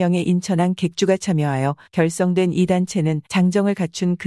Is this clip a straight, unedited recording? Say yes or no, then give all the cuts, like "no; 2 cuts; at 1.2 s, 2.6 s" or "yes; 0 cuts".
no; 2 cuts; at 1.9 s, 3.3 s